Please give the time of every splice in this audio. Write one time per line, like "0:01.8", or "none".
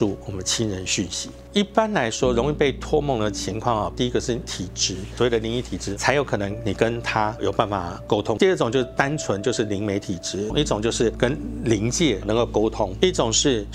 0:10.5